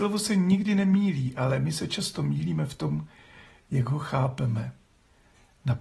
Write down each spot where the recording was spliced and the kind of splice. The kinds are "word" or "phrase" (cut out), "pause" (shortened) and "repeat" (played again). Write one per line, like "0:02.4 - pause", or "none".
none

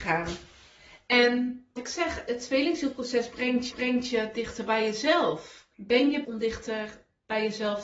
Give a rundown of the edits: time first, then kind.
0:01.8 - word
0:03.7 - repeat
0:05.7 - pause
0:06.2 - word

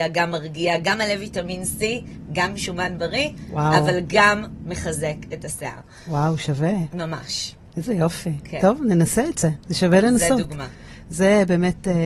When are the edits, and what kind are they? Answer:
none

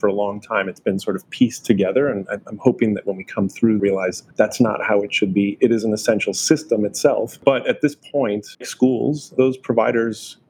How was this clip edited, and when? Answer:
0:03.8 - phrase
0:04.3 - pause
0:08.6 - word

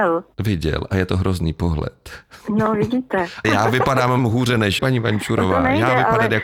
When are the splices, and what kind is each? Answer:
0:03.4 - word
0:04.2 - word
0:04.8 - word

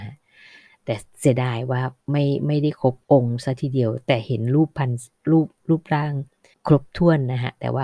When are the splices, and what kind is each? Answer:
0:02.0 - pause
0:03.0 - pause
0:06.5 - pause

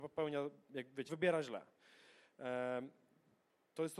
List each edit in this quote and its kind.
0:01.1 - word

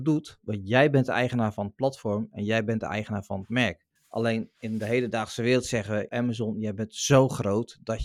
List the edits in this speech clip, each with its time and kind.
0:04.0 - pause
0:06.1 - word

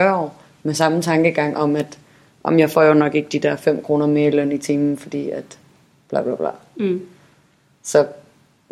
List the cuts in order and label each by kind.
none

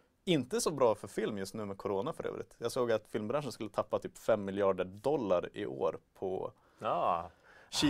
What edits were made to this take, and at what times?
none

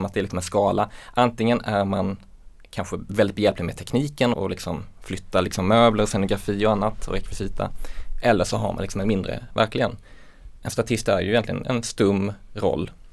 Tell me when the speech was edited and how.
0:04.3 - word
0:09.5 - word

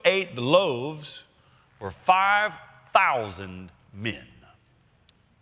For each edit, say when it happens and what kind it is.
none

